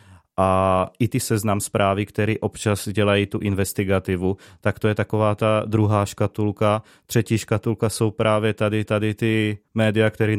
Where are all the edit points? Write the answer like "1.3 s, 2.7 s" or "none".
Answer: 8.9 s

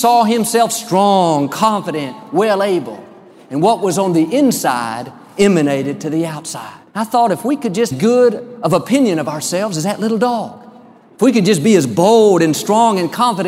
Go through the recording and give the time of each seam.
6.9 s, 7.9 s

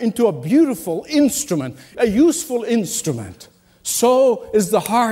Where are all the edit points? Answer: 1.9 s

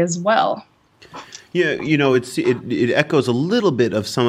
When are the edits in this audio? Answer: none

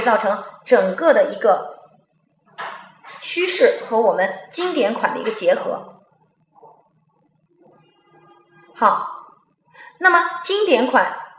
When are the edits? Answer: none

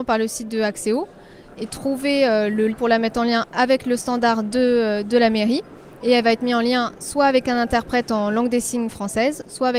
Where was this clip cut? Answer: 2.7 s

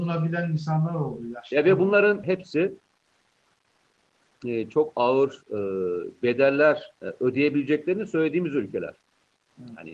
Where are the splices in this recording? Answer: 2.2 s, 6.9 s

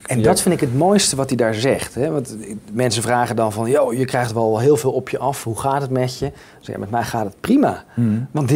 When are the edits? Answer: none

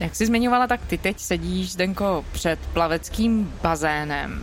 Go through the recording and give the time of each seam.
none

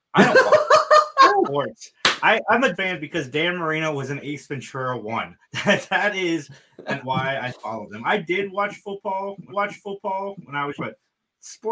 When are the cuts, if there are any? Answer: 1.4 s, 2.7 s, 5.4 s, 7.0 s, 9.5 s, 10.8 s

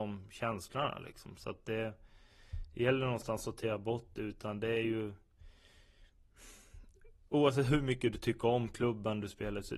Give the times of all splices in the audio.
none

